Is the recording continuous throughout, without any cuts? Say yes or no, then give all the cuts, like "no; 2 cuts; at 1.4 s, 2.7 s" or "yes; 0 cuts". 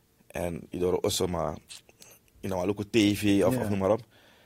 yes; 0 cuts